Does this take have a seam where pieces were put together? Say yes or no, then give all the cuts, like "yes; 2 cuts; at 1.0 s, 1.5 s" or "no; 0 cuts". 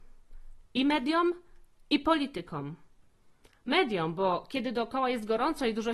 no; 0 cuts